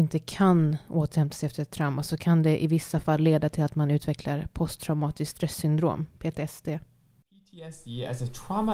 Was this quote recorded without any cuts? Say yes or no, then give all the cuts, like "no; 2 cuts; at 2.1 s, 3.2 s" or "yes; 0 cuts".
no; 1 cut; at 6.1 s